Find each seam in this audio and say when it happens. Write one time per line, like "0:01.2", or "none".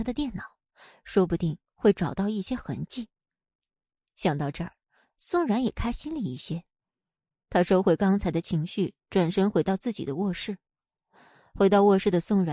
none

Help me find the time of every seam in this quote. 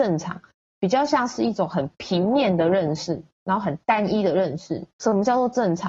0:03.3

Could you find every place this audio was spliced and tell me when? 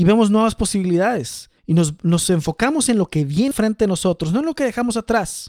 0:01.6
0:03.5

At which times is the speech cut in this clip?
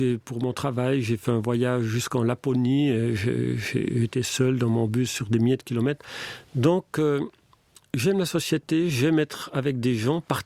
none

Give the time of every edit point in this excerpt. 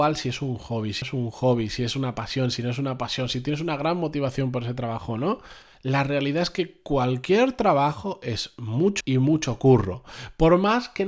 0:01.0
0:05.6
0:09.0

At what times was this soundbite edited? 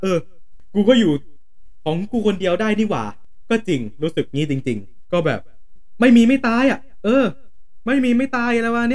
0:05.1

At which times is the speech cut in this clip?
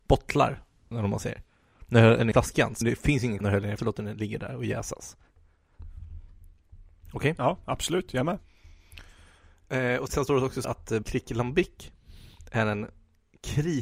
0:00.9
0:02.3
0:02.8
0:03.4
0:03.8
0:10.1
0:10.6
0:11.0

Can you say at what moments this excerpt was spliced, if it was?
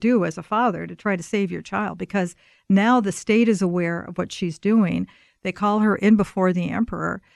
none

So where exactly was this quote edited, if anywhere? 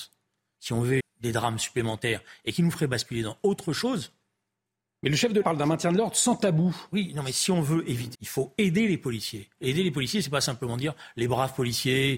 0:01.0
0:05.4
0:08.1

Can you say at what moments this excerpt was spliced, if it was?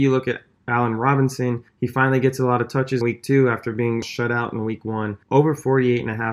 0:01.7
0:03.0
0:04.0
0:05.2

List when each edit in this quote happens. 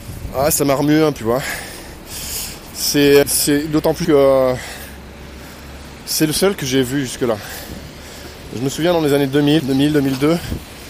0:01.2
0:03.2
0:04.0
0:09.6

